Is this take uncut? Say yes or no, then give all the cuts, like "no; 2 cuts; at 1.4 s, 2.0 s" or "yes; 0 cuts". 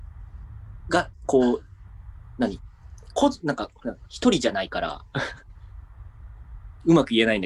no; 1 cut; at 1.1 s